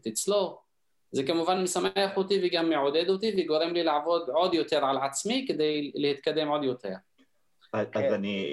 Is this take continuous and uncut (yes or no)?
yes